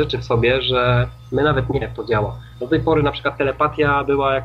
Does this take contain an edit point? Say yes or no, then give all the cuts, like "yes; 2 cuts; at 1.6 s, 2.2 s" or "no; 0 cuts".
yes; 1 cut; at 1.8 s